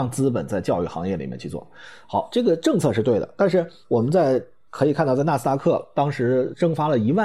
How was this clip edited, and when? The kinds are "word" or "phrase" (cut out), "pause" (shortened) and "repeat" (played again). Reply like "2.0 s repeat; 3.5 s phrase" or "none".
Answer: none